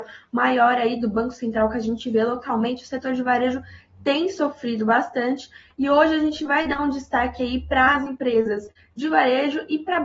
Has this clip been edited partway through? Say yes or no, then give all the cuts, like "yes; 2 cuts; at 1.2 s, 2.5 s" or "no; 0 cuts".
no; 0 cuts